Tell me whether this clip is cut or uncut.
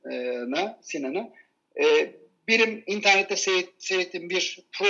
uncut